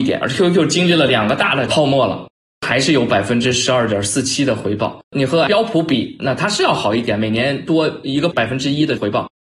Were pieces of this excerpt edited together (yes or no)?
yes